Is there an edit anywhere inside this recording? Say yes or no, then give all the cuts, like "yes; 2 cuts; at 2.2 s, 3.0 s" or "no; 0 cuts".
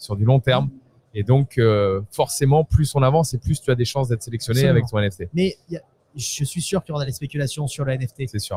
no; 0 cuts